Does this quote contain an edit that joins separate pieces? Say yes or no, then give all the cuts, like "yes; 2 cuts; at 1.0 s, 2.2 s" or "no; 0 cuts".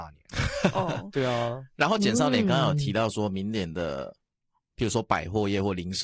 no; 0 cuts